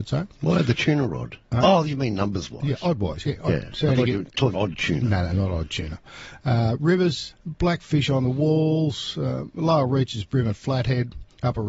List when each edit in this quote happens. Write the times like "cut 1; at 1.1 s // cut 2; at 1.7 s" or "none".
cut 1; at 1.4 s // cut 2; at 4.5 s // cut 3; at 7.3 s